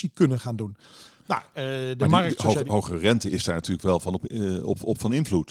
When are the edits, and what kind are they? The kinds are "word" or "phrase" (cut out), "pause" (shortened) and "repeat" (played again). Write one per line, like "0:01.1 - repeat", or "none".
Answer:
none